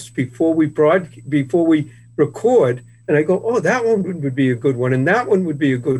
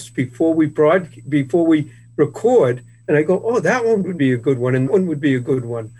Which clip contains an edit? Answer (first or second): second